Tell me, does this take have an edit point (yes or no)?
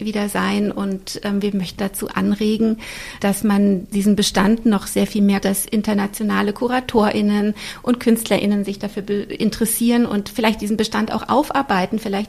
yes